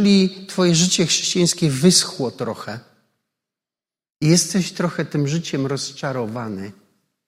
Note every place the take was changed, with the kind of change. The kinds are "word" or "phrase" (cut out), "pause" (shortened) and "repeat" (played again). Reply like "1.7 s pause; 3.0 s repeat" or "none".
none